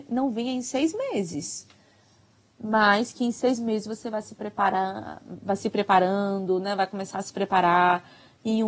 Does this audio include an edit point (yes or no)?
no